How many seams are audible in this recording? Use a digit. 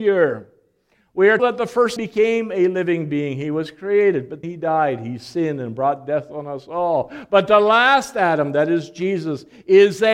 3